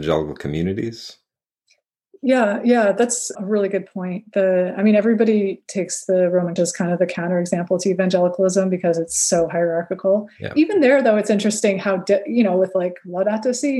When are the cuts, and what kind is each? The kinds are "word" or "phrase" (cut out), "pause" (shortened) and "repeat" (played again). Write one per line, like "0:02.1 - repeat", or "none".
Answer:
0:03.3 - word
0:06.6 - phrase